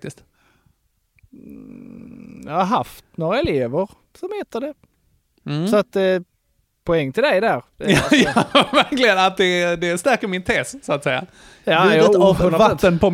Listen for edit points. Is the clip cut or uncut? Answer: uncut